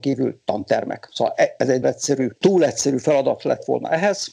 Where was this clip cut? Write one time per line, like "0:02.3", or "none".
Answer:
0:01.8